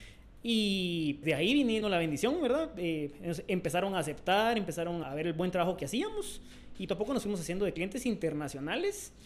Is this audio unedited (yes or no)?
no